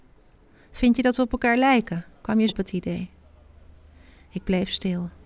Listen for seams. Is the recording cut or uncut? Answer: cut